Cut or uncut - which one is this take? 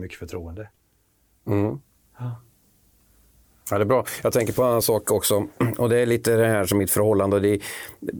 uncut